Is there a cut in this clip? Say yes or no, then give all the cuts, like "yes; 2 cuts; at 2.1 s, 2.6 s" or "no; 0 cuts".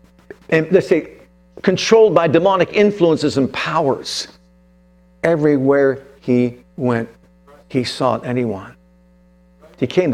no; 0 cuts